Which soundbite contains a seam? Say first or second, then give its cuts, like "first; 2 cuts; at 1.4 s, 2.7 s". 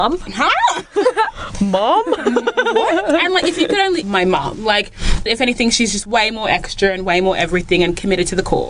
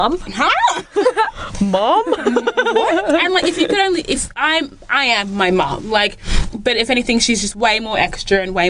first; 2 cuts; at 4.0 s, 5.3 s